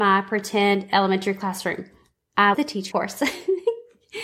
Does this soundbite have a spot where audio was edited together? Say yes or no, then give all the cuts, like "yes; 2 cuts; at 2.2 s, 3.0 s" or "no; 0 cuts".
yes; 2 cuts; at 2.5 s, 2.9 s